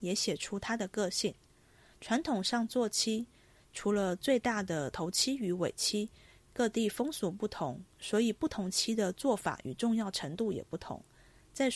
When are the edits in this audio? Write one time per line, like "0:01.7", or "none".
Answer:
none